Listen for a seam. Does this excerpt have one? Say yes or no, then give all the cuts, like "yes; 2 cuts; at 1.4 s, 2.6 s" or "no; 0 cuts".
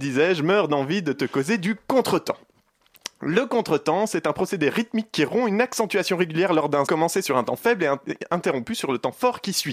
yes; 1 cut; at 6.9 s